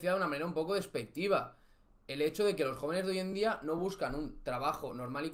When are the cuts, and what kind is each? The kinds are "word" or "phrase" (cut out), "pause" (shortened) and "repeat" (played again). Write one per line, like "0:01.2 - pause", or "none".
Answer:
none